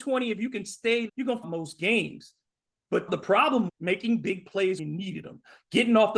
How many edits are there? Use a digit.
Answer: 5